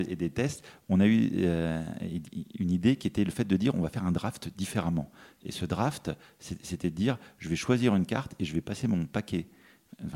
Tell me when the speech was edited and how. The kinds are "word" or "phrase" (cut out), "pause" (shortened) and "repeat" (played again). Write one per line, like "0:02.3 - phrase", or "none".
none